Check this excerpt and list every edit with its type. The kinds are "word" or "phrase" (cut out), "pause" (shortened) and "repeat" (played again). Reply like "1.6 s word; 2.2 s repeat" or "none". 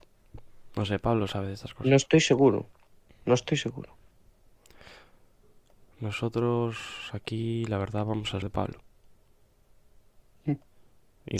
8.4 s word